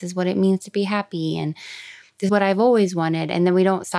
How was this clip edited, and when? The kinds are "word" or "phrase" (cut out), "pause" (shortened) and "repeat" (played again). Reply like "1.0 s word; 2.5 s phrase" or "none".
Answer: 2.3 s word